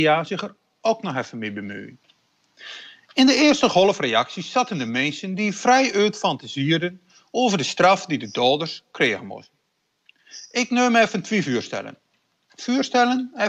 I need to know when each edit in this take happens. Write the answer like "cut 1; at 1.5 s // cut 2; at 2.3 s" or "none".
none